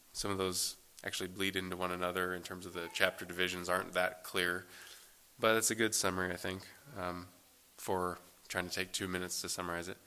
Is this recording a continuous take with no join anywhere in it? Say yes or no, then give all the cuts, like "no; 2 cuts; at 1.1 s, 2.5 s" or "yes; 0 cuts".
yes; 0 cuts